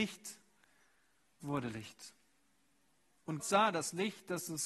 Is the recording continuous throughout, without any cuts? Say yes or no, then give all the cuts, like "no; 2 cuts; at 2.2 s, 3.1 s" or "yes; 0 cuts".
no; 2 cuts; at 1.4 s, 3.4 s